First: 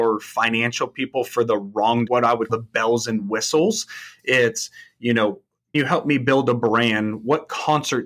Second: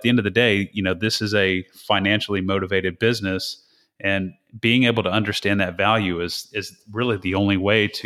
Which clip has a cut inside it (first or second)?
first